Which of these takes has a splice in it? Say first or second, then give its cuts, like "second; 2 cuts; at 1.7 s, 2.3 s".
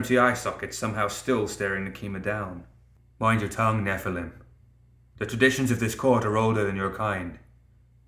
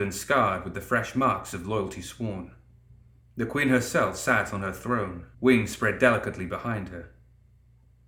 second; 1 cut; at 5.3 s